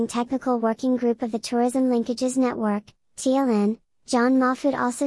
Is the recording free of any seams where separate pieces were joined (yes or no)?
yes